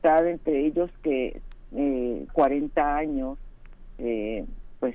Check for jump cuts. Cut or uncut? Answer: cut